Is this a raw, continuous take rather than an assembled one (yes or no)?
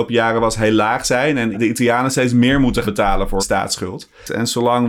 no